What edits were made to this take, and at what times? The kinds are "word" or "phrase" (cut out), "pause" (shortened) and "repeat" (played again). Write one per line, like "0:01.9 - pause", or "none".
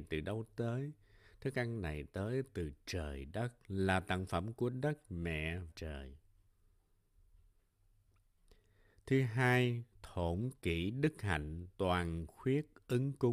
0:05.7 - phrase
0:09.9 - pause
0:11.7 - pause